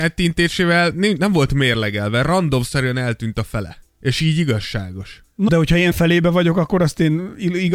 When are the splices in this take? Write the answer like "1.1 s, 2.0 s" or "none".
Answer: 5.5 s, 5.9 s